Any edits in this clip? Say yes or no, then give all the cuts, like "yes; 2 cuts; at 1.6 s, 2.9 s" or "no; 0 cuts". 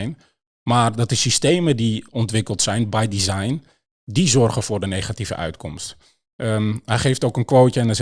no; 0 cuts